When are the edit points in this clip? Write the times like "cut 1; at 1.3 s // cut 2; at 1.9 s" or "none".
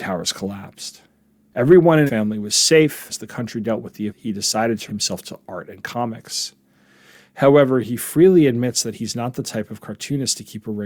cut 1; at 2.1 s // cut 2; at 3.1 s // cut 3; at 4.1 s // cut 4; at 4.9 s